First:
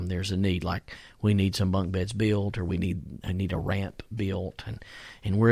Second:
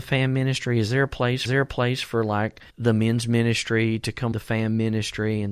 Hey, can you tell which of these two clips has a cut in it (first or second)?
second